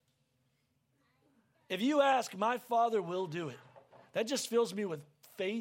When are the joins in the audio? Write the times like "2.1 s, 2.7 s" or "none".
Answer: none

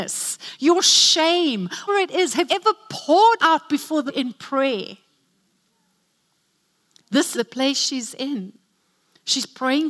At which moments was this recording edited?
1.9 s, 2.5 s, 3.4 s, 4.1 s, 7.3 s

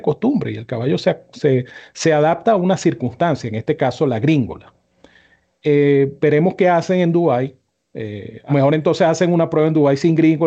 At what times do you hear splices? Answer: 8.5 s

